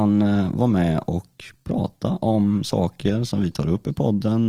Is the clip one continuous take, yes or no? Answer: yes